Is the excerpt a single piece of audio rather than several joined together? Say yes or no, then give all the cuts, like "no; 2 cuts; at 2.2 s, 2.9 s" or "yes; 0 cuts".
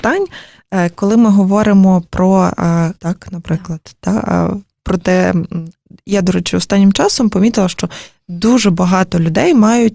no; 1 cut; at 3.0 s